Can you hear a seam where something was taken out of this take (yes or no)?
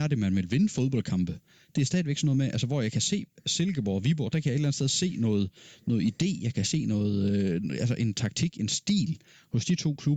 no